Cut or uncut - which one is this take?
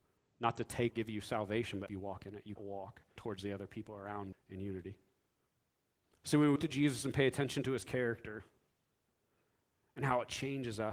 cut